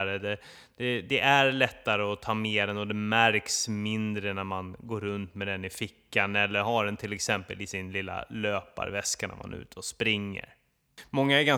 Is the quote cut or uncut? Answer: uncut